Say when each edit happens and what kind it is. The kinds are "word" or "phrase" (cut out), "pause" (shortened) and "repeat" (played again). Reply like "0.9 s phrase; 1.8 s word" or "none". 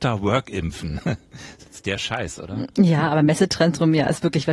none